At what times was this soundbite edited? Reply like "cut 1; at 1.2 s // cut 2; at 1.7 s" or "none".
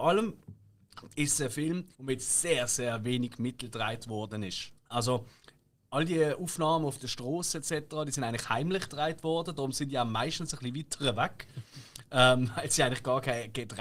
cut 1; at 1.9 s // cut 2; at 4.8 s

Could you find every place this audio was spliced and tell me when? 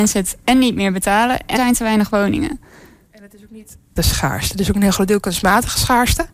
cut 1; at 1.6 s // cut 2; at 4.0 s

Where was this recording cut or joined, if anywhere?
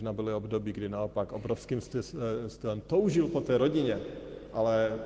none

